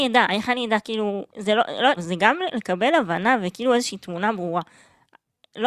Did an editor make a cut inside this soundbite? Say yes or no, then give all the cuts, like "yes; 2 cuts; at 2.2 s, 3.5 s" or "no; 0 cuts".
yes; 2 cuts; at 1.3 s, 2.0 s